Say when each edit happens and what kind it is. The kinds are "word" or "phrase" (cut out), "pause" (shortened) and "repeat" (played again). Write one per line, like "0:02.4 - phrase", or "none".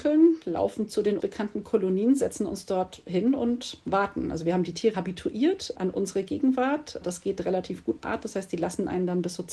0:01.2 - word
0:04.9 - word
0:08.0 - word